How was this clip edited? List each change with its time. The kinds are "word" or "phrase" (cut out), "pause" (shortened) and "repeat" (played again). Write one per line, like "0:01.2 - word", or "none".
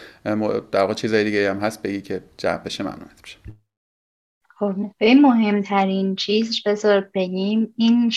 0:04.9 - word